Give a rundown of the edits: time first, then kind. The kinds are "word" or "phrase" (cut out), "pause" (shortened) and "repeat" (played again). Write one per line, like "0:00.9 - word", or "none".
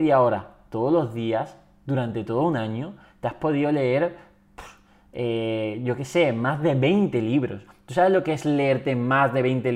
none